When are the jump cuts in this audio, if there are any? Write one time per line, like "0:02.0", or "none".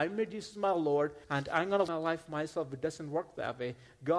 0:01.2
0:01.9